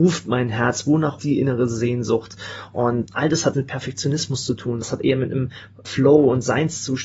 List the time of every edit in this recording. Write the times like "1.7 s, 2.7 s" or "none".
1.2 s, 3.0 s, 3.5 s, 4.8 s, 5.8 s